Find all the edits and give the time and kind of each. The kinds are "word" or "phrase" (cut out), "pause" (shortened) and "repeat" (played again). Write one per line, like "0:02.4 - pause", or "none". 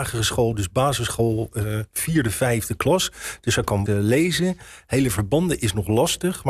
0:03.9 - word

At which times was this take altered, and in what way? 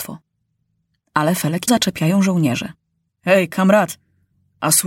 0:01.7 - phrase
0:03.1 - pause

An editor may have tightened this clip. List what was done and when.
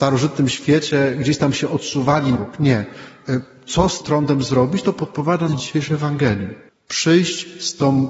0:02.4 - word
0:04.0 - word
0:05.5 - phrase
0:06.7 - pause

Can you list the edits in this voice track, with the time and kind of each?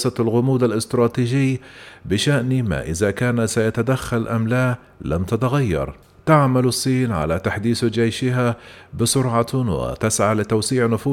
0:06.0 - pause

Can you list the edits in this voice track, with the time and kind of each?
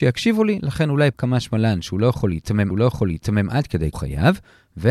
0:01.1 - phrase
0:02.7 - repeat
0:03.9 - phrase

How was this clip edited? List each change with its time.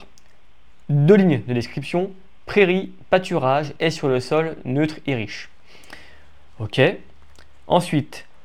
0:03.8 - word

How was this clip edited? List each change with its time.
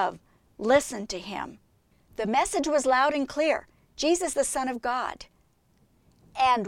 0:04.3 - word

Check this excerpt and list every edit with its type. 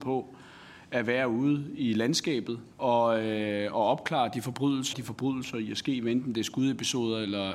0:02.7 - pause
0:04.9 - phrase

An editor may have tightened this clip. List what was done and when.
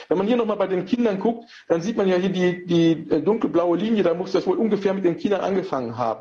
none

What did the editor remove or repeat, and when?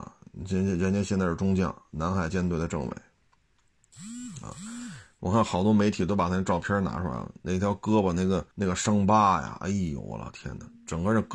0:08.5 - pause

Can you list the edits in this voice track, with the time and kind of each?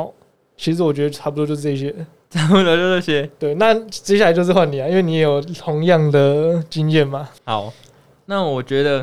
0:07.4 - pause

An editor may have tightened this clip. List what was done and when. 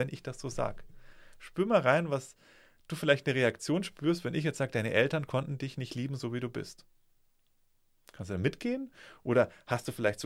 none

